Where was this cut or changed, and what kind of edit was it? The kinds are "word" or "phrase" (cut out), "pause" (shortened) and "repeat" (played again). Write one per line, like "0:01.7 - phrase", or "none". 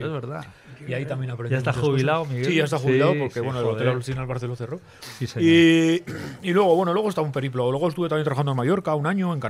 none